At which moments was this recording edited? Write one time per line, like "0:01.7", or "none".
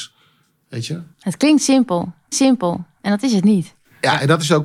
0:01.1
0:02.3